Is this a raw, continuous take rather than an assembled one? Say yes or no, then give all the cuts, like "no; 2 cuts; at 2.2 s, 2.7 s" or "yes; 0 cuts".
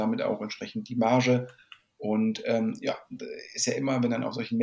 yes; 0 cuts